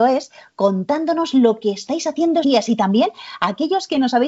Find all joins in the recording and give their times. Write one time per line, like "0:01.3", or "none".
0:02.4